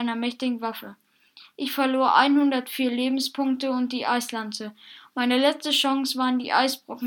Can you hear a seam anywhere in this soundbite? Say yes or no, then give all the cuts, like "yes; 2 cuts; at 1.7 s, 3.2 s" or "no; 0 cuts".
no; 0 cuts